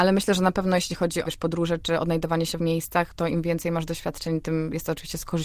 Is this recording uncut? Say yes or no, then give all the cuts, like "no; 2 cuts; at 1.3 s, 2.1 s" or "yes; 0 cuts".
no; 2 cuts; at 1.2 s, 2.6 s